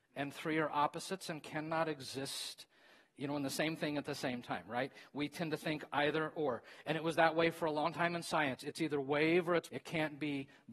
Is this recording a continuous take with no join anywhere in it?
no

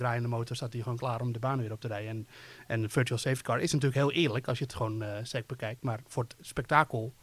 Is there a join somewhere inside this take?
no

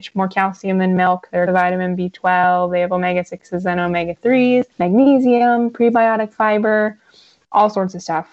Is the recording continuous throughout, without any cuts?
no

